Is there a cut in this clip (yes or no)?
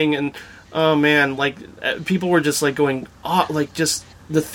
no